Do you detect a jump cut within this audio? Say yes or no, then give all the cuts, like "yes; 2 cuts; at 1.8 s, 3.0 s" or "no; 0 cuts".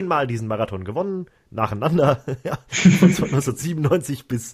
no; 0 cuts